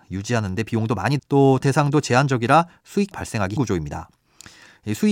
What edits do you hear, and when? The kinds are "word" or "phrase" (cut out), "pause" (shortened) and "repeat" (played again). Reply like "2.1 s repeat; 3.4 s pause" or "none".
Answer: 1.2 s word; 1.6 s word; 3.1 s word; 3.6 s word